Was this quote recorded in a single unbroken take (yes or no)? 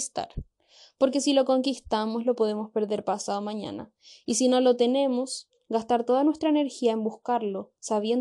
yes